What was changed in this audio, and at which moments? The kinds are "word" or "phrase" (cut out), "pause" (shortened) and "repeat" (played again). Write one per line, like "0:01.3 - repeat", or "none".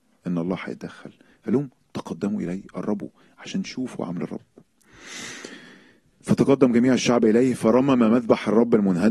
none